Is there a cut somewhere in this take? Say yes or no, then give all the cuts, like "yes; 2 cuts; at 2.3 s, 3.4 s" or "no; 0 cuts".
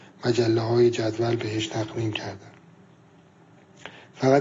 no; 0 cuts